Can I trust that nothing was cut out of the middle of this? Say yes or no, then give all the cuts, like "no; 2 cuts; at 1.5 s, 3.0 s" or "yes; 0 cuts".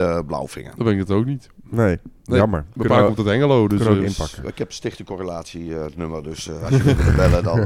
yes; 0 cuts